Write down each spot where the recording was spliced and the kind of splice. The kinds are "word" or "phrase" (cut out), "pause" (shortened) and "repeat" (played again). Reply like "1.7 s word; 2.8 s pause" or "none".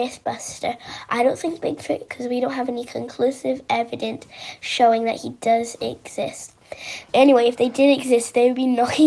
2.1 s word